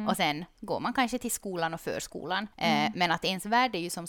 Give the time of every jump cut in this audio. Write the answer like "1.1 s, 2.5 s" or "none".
2.5 s